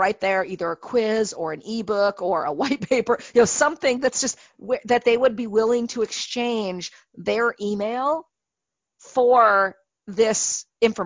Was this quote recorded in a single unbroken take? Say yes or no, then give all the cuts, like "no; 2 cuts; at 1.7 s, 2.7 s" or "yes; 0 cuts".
yes; 0 cuts